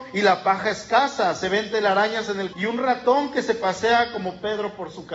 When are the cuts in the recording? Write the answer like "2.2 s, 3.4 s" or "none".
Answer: 2.5 s

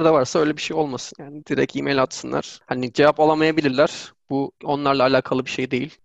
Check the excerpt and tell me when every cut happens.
1.4 s, 4.6 s

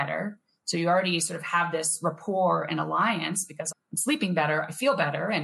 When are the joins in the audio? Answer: 3.7 s

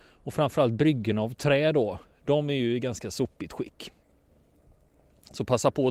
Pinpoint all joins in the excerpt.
none

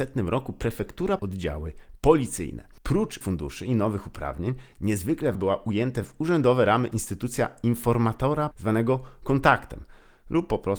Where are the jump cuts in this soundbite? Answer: 1.2 s, 3.2 s, 5.3 s, 8.5 s

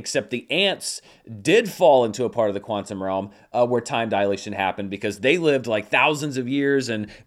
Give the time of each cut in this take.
none

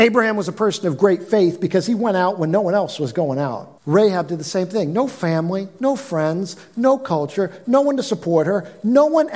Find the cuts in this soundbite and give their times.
3.8 s

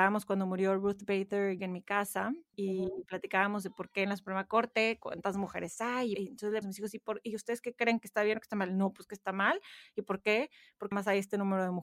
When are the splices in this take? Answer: 1.6 s, 6.1 s, 6.6 s, 10.9 s

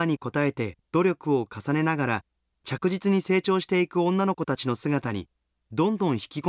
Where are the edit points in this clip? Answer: none

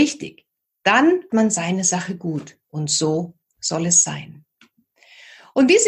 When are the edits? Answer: 1.3 s, 2.6 s

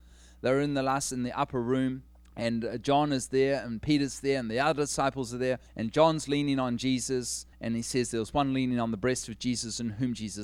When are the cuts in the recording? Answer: 2.1 s, 5.7 s, 7.5 s

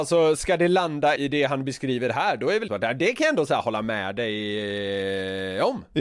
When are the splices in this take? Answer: 1.2 s, 2.7 s

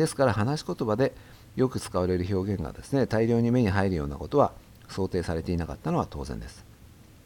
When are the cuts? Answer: none

